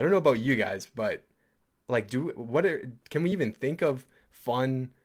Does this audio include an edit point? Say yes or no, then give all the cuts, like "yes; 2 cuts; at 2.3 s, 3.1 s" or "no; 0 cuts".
no; 0 cuts